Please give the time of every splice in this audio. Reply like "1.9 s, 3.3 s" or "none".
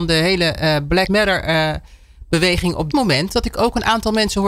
1.1 s, 2.9 s